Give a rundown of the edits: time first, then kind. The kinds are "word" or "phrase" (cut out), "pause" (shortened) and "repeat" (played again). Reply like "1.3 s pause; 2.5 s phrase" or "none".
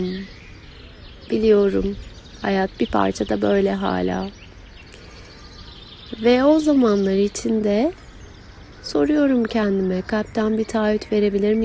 none